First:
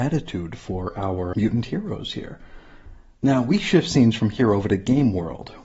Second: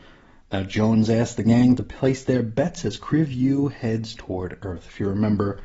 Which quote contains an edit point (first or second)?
first